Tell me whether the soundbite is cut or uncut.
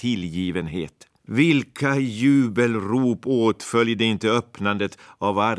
cut